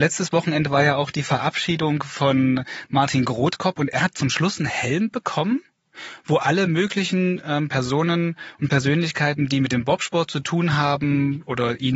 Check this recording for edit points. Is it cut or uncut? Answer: uncut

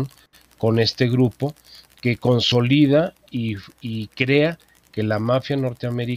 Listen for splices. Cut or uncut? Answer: uncut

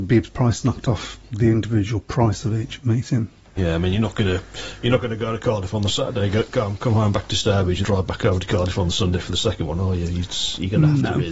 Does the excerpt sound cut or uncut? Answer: cut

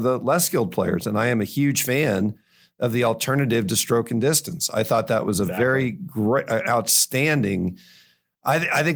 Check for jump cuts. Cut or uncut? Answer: uncut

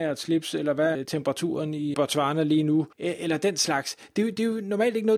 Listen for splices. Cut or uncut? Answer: cut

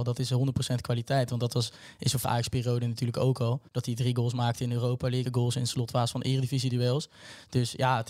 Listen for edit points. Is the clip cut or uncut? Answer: cut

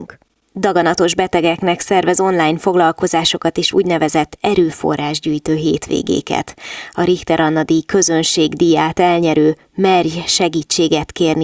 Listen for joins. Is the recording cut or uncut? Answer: uncut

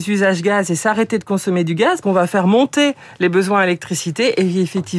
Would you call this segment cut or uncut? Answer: cut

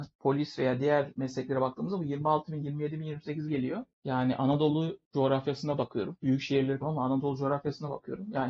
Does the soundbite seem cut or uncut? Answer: cut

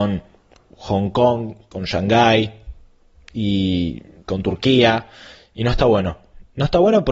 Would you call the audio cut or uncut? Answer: uncut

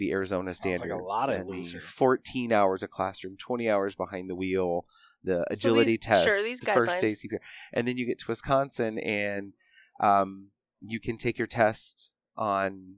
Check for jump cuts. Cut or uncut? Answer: uncut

